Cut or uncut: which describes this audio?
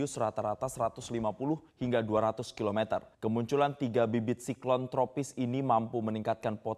cut